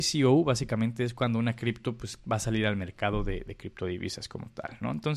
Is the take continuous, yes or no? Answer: yes